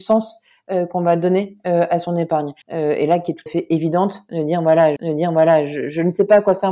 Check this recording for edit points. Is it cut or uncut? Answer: cut